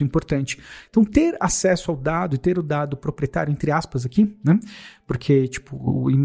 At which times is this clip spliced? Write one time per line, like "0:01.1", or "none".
none